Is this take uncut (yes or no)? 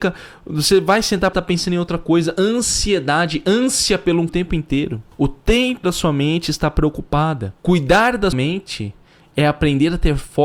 no